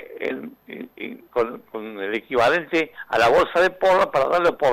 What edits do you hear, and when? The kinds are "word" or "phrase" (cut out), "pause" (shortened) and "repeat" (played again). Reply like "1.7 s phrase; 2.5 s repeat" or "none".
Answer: 1.3 s pause